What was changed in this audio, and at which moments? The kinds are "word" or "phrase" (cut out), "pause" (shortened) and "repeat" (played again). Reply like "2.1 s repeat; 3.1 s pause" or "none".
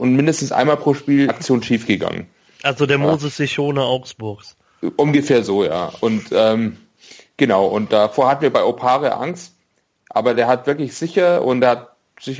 1.3 s phrase